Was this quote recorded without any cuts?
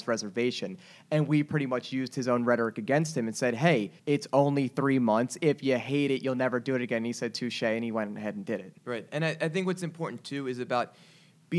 no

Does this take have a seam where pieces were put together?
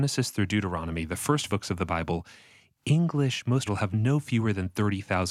yes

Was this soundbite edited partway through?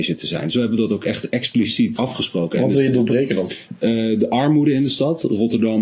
yes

